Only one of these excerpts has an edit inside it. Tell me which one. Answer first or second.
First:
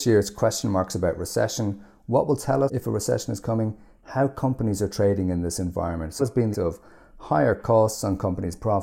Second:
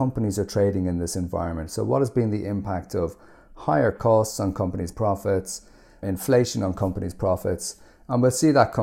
first